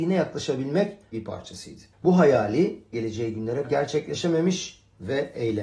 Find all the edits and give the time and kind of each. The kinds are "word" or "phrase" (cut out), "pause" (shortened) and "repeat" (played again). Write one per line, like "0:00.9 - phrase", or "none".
0:01.1 - word
0:01.9 - pause
0:02.9 - word
0:03.6 - word